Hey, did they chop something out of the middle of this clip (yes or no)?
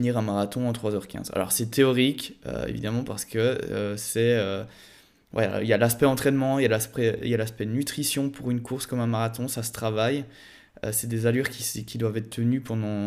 no